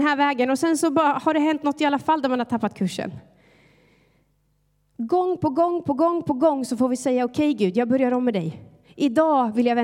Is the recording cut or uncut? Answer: uncut